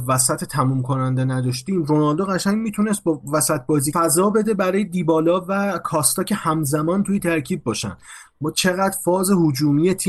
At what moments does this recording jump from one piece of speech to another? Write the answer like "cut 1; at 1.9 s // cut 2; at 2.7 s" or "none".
cut 1; at 3.9 s